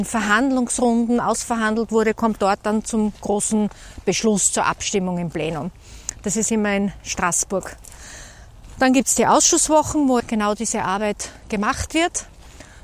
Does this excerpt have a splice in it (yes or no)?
yes